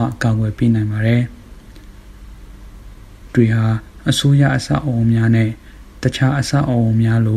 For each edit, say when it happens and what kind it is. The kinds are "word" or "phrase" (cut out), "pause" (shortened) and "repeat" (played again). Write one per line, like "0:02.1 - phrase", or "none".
0:03.3 - word